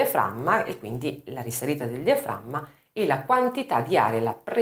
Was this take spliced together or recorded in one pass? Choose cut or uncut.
uncut